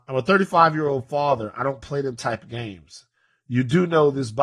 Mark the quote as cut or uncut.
uncut